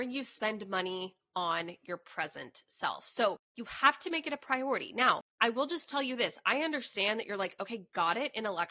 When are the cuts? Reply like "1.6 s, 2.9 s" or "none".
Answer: 3.4 s, 5.3 s